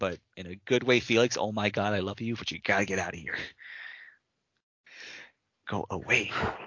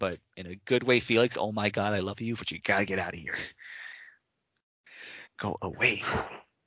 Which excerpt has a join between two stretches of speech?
second; 1 cut; at 5.3 s

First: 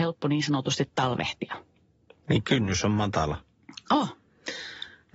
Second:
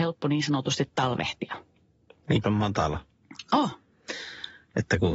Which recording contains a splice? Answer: second; 1 cut; at 2.4 s

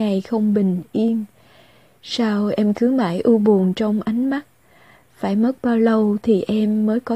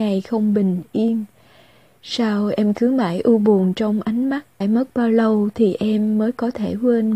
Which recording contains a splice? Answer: second; 1 cut; at 4.6 s

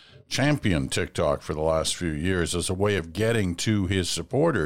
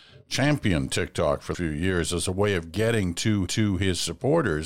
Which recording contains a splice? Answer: second; 2 cuts; at 1.5 s, 3.5 s

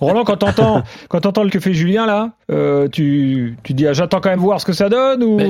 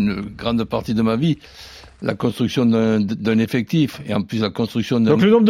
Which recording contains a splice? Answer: first; 3 cuts; at 1.5 s, 2.4 s, 4.4 s

